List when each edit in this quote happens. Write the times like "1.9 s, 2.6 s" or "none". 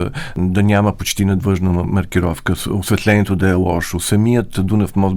none